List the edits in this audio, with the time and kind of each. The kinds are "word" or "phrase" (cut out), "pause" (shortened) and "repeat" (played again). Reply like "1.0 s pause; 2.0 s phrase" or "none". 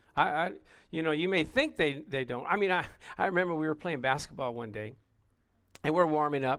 none